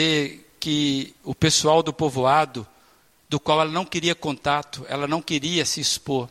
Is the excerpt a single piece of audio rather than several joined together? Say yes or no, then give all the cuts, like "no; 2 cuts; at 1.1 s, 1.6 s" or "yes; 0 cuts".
yes; 0 cuts